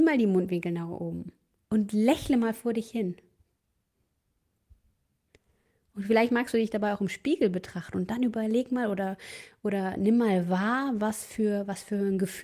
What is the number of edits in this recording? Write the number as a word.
zero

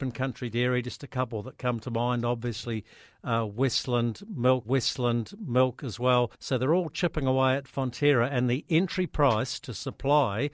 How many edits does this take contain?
two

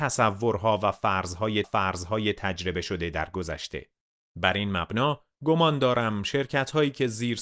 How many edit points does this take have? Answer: one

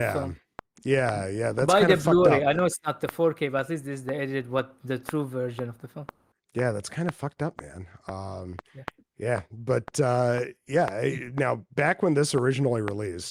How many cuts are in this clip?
one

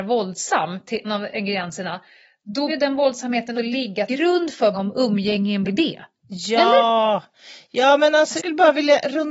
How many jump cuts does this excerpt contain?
seven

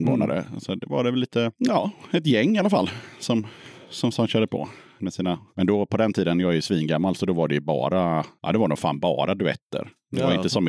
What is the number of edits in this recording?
zero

